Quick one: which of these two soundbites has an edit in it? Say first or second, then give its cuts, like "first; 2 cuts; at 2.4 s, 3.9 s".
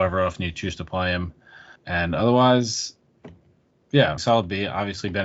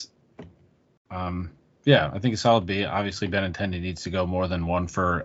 first; 3 cuts; at 1.8 s, 3.8 s, 4.2 s